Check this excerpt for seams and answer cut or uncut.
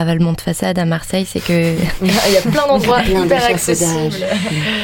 uncut